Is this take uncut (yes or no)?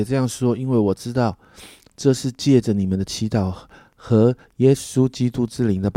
yes